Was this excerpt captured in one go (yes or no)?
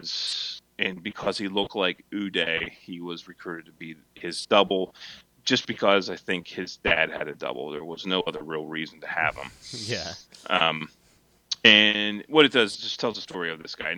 yes